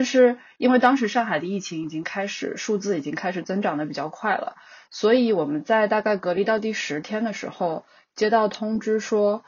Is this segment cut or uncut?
uncut